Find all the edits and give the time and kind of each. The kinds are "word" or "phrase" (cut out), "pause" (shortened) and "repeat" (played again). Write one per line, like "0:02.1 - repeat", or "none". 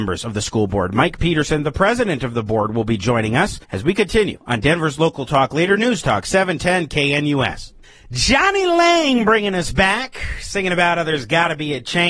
0:03.6 - pause
0:07.8 - pause